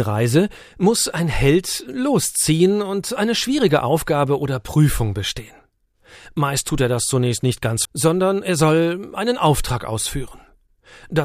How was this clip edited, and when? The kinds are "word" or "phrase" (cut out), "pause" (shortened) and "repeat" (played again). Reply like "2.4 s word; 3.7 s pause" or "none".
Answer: 7.8 s word